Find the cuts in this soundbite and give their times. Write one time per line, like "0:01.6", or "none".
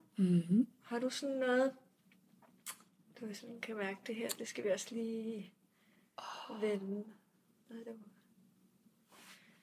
none